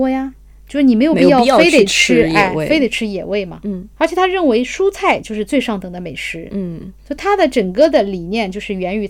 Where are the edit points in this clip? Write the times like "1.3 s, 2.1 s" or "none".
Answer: 3.9 s, 7.0 s